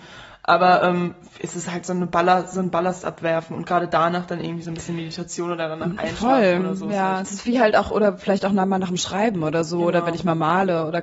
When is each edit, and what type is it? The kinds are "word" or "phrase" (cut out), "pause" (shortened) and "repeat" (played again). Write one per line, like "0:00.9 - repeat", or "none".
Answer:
none

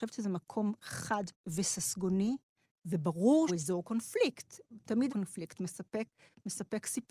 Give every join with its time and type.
0:01.3 - word
0:03.5 - word
0:05.1 - word

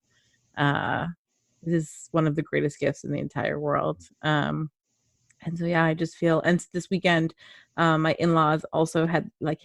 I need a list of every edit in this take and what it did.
none

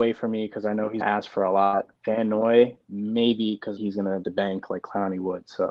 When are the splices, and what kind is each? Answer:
0:01.0 - word
0:01.9 - pause
0:02.8 - pause
0:03.8 - phrase
0:04.2 - word

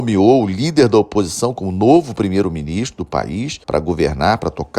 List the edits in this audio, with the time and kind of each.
0:03.6 - pause

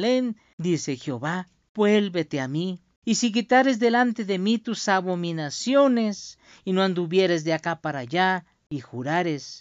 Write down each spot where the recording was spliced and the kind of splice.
none

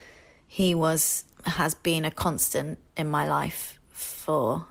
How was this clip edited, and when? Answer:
0:01.3 - pause

